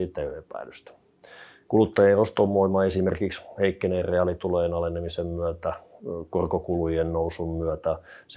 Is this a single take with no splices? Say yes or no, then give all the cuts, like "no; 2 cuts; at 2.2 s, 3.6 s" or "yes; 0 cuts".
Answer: yes; 0 cuts